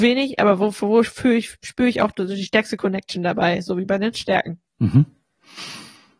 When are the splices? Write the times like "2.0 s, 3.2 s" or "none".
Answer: 4.7 s